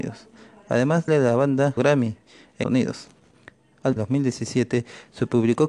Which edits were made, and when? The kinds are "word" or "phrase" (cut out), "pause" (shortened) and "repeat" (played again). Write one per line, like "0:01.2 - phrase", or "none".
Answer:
0:01.1 - word
0:01.8 - word
0:02.6 - word
0:04.0 - phrase